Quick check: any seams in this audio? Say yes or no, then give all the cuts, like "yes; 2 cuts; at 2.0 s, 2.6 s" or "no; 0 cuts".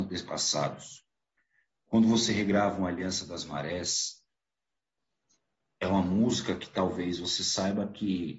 no; 0 cuts